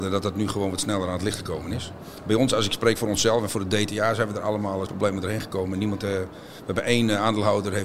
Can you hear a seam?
yes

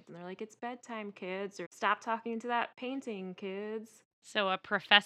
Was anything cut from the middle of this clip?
yes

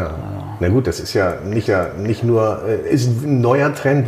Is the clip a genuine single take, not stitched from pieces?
no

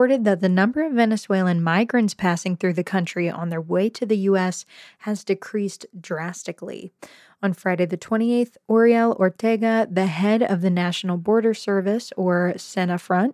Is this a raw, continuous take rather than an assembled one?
yes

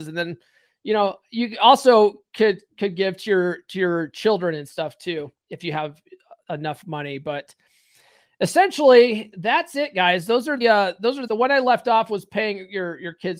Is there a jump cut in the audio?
yes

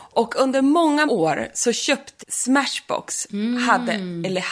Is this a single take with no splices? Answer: no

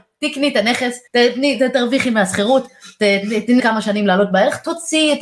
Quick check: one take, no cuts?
no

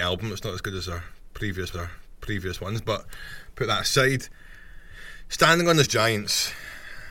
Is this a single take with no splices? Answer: no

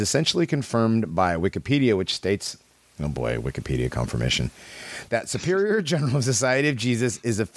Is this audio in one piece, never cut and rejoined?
yes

